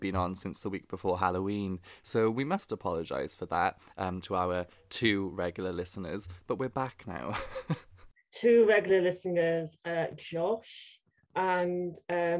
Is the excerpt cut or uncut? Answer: uncut